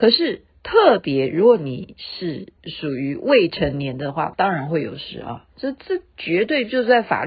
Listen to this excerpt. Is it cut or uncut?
cut